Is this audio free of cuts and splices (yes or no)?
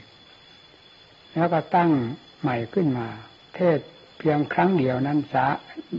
no